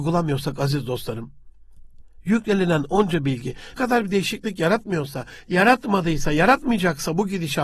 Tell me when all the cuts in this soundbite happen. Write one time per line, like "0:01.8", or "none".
0:03.8